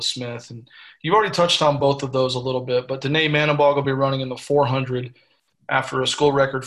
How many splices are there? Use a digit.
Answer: 0